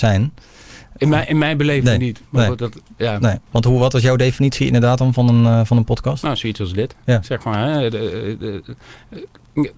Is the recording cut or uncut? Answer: cut